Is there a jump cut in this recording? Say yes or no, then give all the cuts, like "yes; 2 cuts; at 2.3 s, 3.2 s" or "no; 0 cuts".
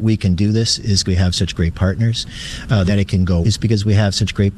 yes; 3 cuts; at 1.0 s, 2.9 s, 3.4 s